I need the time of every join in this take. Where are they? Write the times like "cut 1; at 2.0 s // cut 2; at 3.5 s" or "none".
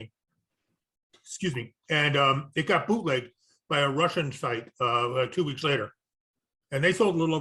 none